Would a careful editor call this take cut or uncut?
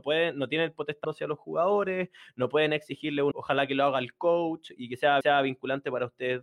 cut